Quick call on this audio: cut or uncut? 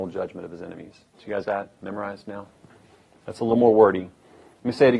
cut